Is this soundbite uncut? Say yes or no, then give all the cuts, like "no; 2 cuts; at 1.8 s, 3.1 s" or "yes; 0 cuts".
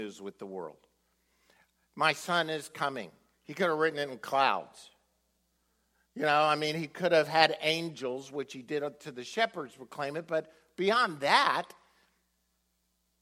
yes; 0 cuts